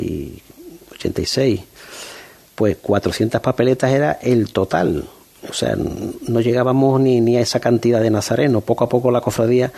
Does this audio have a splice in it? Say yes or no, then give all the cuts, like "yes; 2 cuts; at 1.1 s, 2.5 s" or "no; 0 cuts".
no; 0 cuts